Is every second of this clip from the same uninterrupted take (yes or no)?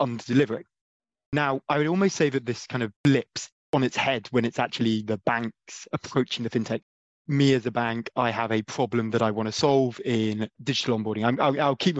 yes